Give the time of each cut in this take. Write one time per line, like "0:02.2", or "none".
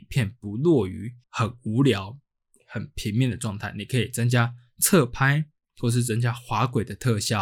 0:01.2